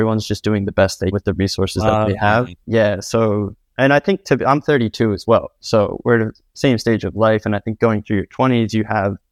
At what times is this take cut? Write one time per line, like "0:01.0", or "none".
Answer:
0:01.1
0:02.6